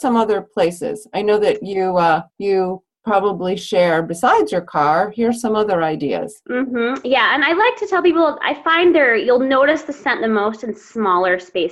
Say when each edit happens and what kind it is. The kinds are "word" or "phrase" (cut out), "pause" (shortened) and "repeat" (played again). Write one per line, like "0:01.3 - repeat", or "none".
0:02.3 - pause